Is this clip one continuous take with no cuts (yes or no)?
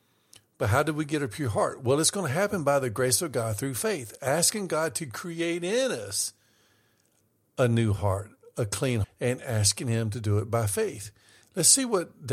no